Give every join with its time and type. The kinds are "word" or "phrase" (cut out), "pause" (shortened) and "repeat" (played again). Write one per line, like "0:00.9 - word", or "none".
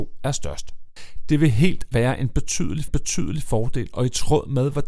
0:01.9 - word
0:02.9 - repeat